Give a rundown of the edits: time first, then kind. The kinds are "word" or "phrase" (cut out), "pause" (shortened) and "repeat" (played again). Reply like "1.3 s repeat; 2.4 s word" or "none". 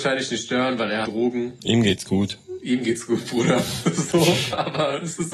1.0 s phrase